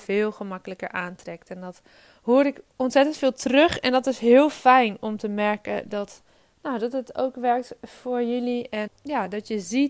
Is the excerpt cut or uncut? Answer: cut